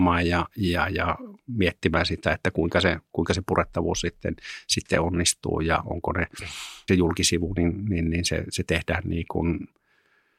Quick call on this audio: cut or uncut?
cut